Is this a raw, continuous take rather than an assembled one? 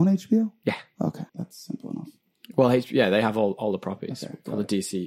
no; 1 cut; at 1.3 s

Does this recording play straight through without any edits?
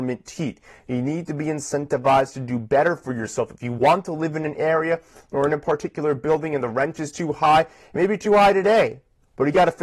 yes; 0 cuts

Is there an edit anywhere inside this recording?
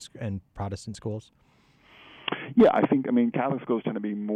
no; 0 cuts

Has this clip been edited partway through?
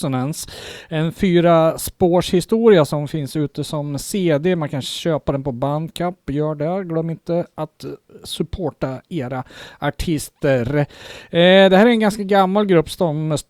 no; 0 cuts

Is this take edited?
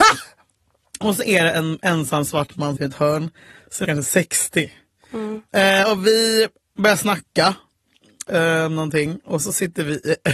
yes; 3 cuts; at 2.8 s, 3.8 s, 9.4 s

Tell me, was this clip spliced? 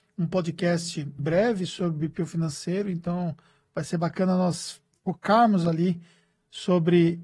yes; 1 cut; at 1.2 s

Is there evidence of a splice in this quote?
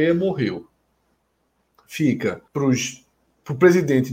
yes; 1 cut; at 2.5 s

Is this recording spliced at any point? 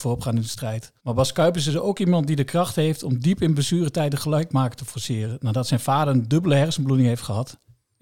yes; 1 cut; at 1.0 s

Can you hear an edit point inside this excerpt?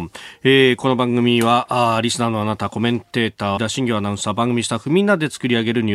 yes; 1 cut; at 3.6 s

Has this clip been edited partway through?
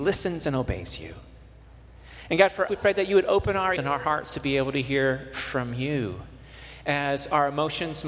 yes; 2 cuts; at 2.7 s, 3.8 s

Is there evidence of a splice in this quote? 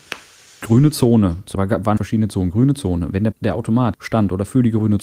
yes; 4 cuts; at 1.5 s, 2.0 s, 3.3 s, 3.9 s

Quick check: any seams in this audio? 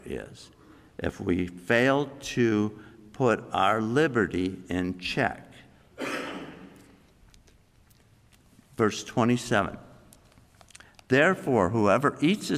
no; 0 cuts

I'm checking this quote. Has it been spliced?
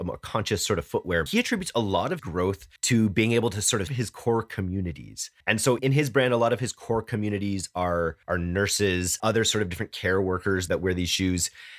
yes; 8 cuts; at 1.3 s, 2.2 s, 2.8 s, 3.9 s, 5.4 s, 5.8 s, 8.2 s, 9.2 s

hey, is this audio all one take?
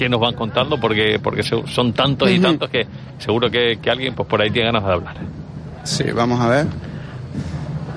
no; 1 cut; at 4.1 s

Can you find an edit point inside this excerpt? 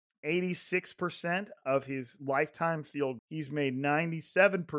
yes; 1 cut; at 3.2 s

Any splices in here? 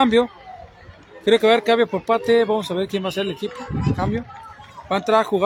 no; 0 cuts

